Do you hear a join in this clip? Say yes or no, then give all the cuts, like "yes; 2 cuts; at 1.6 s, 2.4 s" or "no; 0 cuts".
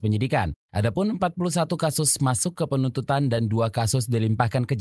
no; 0 cuts